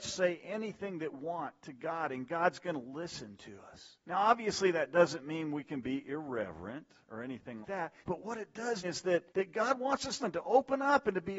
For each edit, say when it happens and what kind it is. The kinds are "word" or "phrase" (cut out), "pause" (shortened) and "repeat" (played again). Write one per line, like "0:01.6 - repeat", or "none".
0:01.1 - word
0:04.0 - pause
0:07.6 - word
0:08.0 - pause
0:08.8 - word
0:09.3 - pause
0:10.2 - phrase